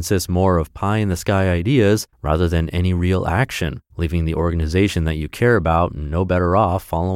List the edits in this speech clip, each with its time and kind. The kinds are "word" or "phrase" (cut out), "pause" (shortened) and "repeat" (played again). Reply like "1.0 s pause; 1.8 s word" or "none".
2.1 s pause; 3.9 s pause